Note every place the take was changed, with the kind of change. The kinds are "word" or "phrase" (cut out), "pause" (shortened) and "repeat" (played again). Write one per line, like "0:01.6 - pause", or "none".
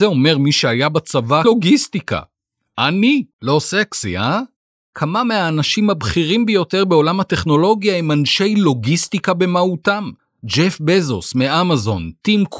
0:01.4 - word
0:03.3 - pause
0:10.2 - pause

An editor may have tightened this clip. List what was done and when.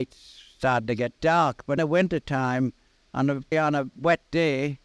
0:01.8 - word
0:03.5 - word

